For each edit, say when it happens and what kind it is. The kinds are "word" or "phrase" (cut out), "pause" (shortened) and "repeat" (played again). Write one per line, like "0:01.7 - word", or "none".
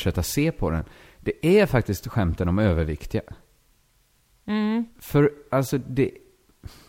none